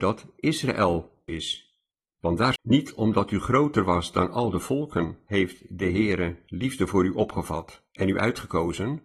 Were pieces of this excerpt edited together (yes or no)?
yes